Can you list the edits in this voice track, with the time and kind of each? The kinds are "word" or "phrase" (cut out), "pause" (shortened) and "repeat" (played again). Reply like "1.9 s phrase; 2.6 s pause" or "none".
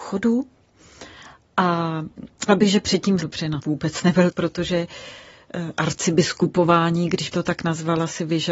2.5 s word; 3.2 s word; 3.6 s word; 4.3 s word; 7.3 s word